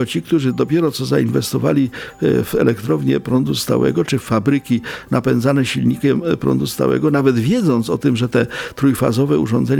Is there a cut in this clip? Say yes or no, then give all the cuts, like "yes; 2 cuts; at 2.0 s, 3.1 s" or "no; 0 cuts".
no; 0 cuts